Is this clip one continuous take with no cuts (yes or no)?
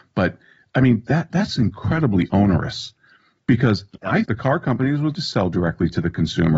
no